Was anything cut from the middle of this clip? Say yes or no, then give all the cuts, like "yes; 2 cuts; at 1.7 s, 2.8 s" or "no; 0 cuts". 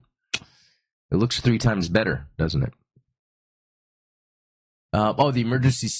no; 0 cuts